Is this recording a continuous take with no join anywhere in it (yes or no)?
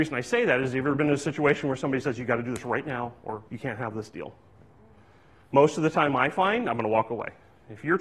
no